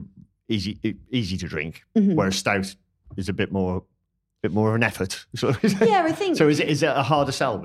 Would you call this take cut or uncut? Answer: uncut